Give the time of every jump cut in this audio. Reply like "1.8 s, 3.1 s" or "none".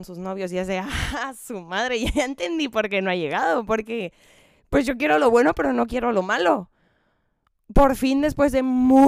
none